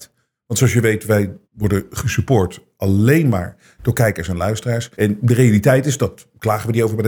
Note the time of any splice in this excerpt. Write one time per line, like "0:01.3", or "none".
0:01.4
0:04.9